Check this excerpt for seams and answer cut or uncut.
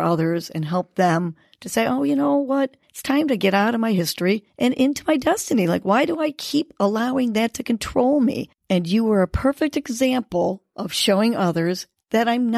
cut